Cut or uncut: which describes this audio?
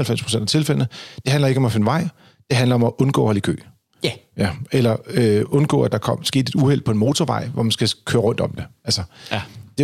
uncut